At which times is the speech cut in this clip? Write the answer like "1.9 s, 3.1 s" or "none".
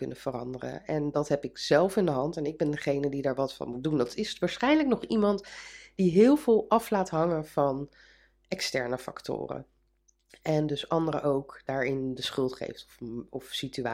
none